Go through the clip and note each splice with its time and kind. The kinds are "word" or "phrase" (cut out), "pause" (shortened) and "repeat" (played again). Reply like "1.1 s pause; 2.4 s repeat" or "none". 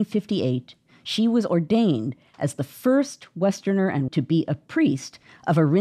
4.1 s word